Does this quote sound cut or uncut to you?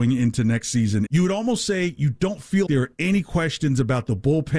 cut